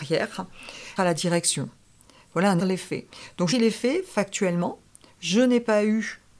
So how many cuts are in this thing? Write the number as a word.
three